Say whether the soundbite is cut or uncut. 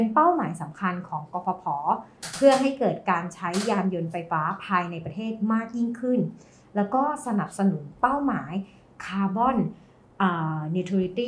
uncut